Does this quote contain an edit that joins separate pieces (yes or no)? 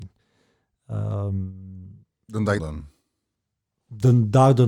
yes